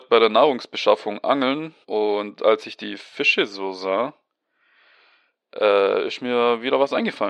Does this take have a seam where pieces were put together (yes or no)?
yes